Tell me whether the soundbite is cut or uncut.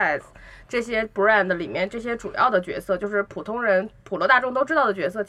uncut